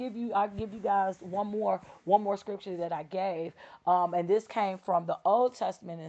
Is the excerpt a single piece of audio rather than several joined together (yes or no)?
yes